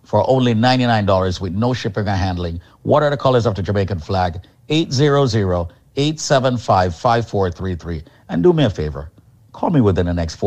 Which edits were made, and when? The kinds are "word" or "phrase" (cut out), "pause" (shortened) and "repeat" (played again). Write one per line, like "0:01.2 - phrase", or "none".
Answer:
none